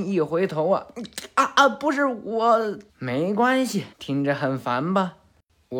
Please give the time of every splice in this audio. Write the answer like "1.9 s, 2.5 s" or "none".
2.9 s, 3.9 s